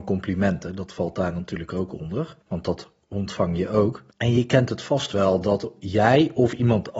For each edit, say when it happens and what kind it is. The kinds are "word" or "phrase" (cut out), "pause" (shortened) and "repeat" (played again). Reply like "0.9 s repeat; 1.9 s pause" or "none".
2.4 s pause; 4.1 s pause

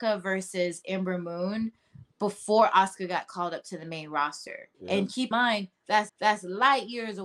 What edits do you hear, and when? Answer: 4.7 s pause; 5.3 s word; 6.1 s repeat

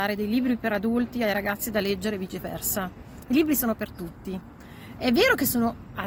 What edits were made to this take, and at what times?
none

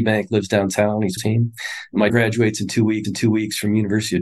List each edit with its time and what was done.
1.2 s phrase; 2.1 s word; 3.0 s repeat

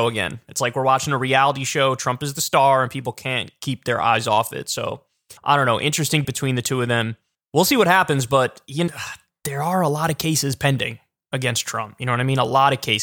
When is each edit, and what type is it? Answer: 5.4 s pause; 6.2 s word; 7.3 s pause; 8.9 s word

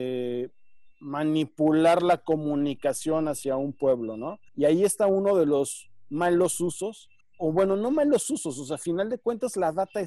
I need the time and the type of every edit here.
4.5 s pause; 7.2 s pause

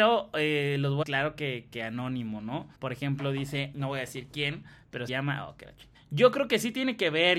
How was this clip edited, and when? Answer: 1.0 s phrase; 2.7 s pause; 3.7 s word; 5.1 s word; 5.9 s pause

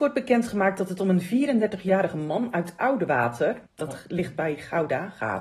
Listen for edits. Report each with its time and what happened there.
3.7 s pause

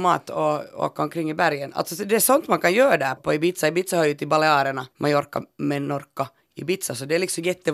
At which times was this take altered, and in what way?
3.2 s word; 4.9 s pause

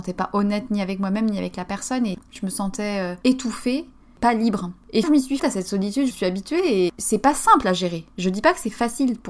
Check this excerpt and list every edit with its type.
5.0 s word; 5.4 s word; 6.1 s word

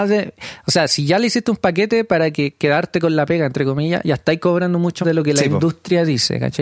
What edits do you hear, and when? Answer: 5.0 s word

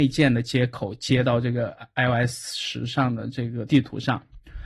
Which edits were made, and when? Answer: none

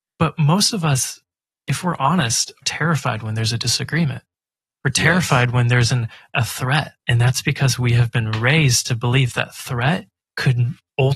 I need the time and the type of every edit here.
2.6 s word; 7.0 s pause

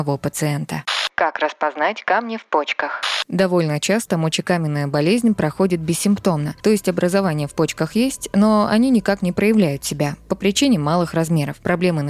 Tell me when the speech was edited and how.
6.6 s pause

